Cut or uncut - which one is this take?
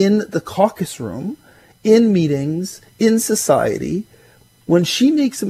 uncut